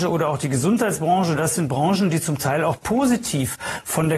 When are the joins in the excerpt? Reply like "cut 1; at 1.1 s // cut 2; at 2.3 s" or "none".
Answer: none